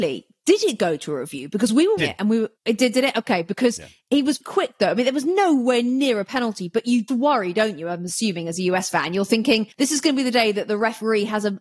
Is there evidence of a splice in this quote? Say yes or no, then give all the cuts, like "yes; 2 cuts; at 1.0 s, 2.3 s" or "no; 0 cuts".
yes; 5 cuts; at 2.0 s, 2.6 s, 4.4 s, 7.1 s, 9.7 s